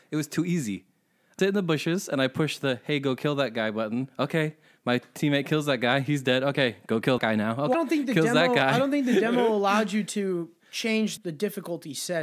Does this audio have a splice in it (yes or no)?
yes